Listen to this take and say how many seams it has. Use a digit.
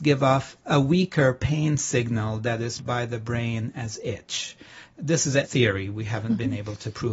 2